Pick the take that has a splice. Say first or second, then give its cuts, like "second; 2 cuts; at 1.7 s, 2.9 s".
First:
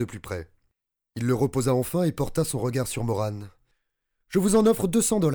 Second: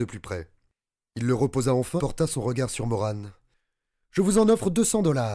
second; 1 cut; at 2.0 s